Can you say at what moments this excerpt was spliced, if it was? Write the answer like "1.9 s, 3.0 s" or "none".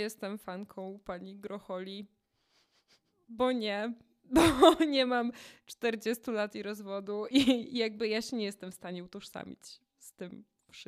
7.3 s